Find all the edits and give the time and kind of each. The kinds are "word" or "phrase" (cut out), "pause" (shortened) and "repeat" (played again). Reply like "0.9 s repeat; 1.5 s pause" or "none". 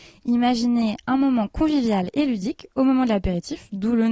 none